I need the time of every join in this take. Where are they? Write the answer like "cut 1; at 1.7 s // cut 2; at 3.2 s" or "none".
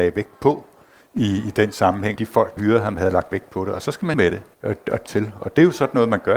cut 1; at 2.2 s // cut 2; at 2.6 s // cut 3; at 4.1 s // cut 4; at 4.5 s // cut 5; at 5.1 s

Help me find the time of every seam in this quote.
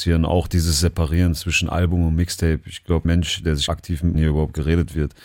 cut 1; at 3.0 s // cut 2; at 3.7 s // cut 3; at 4.1 s

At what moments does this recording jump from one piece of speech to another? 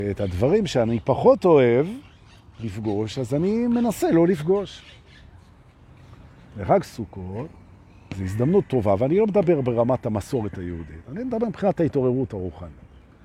none

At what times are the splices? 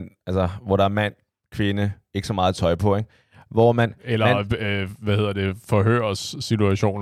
none

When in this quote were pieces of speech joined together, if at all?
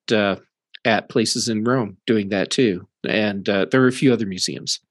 cut 1; at 2.0 s

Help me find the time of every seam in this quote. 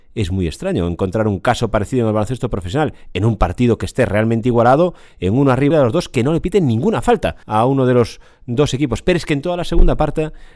cut 1; at 5.7 s // cut 2; at 7.4 s

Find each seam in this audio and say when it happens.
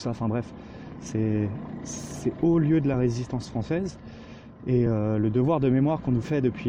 none

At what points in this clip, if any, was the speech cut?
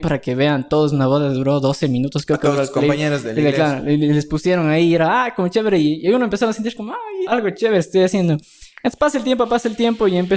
cut 1; at 7.3 s

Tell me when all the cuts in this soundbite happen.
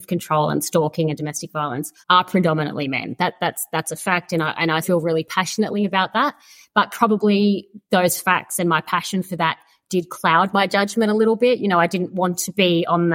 cut 1; at 2.0 s // cut 2; at 4.8 s // cut 3; at 7.8 s

